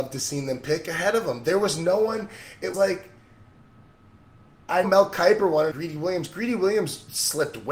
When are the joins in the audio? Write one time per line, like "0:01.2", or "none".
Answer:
0:02.7
0:04.8
0:05.7